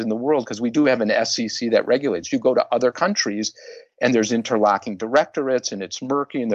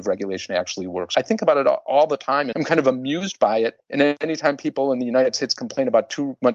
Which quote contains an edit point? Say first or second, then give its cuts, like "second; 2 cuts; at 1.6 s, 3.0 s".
second; 2 cuts; at 1.1 s, 2.5 s